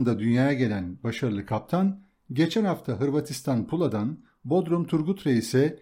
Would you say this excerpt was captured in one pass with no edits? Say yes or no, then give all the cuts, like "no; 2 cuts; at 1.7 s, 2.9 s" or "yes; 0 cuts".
yes; 0 cuts